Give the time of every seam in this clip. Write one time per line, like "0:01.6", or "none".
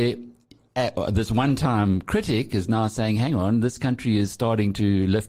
none